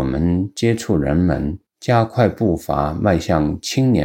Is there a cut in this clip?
yes; 1 cut; at 1.7 s

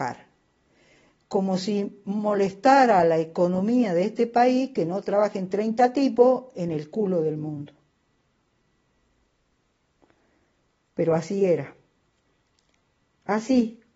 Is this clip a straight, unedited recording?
yes; 0 cuts

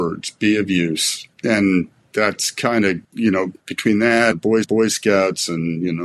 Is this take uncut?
no; 5 cuts; at 1.3 s, 3.0 s, 3.6 s, 4.3 s, 4.6 s

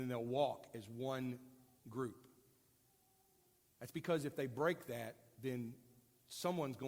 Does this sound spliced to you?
no; 0 cuts

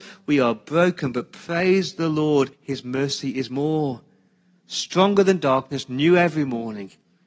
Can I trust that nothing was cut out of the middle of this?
no; 1 cut; at 2.5 s

